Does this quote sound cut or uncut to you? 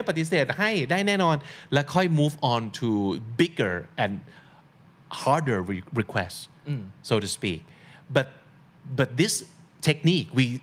uncut